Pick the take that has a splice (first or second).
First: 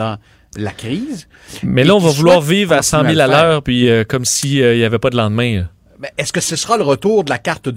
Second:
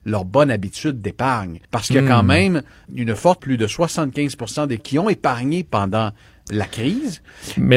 second